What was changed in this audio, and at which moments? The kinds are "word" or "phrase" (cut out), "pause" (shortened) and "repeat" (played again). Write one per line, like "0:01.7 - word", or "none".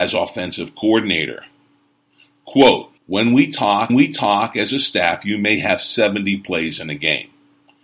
0:03.0 - pause
0:03.9 - repeat